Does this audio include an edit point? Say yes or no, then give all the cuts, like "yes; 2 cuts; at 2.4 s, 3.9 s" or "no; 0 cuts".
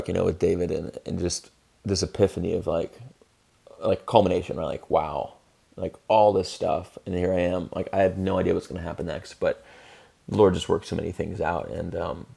no; 0 cuts